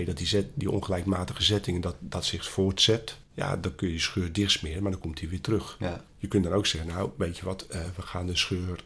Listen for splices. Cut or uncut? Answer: cut